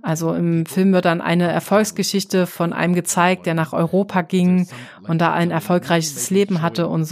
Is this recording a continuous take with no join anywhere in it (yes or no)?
yes